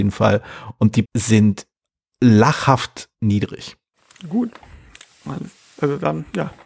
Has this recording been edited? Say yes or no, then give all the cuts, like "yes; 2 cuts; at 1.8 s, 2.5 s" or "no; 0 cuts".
yes; 1 cut; at 1.1 s